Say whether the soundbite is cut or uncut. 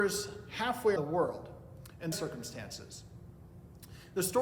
cut